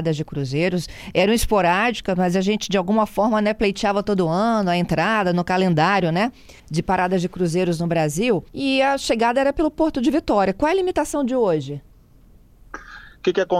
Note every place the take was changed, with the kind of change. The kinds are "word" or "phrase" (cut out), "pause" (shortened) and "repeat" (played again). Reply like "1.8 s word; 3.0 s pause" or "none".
6.6 s pause; 8.5 s pause